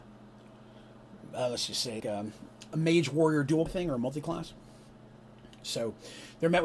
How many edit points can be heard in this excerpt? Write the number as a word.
three